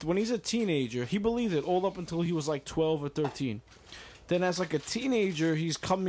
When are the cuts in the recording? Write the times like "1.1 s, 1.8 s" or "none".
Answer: none